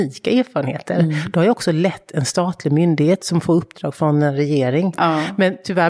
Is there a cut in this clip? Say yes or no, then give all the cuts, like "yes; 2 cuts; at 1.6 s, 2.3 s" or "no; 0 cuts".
no; 0 cuts